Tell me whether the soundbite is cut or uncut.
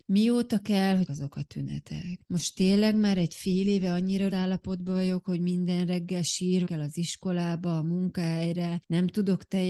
cut